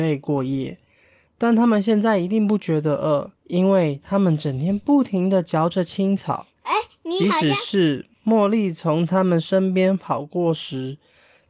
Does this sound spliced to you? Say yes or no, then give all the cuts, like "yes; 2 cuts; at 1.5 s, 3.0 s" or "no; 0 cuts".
yes; 2 cuts; at 3.4 s, 8.1 s